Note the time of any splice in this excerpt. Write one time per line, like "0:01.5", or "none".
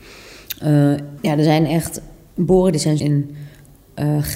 0:01.2
0:03.0